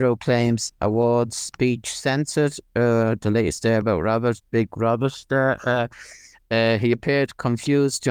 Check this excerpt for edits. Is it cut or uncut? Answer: uncut